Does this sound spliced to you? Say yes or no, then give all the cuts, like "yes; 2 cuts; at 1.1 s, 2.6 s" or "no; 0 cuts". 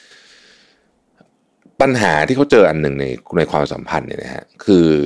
no; 0 cuts